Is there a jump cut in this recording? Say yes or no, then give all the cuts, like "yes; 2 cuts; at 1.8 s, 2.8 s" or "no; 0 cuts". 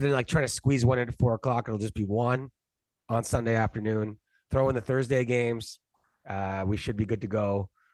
no; 0 cuts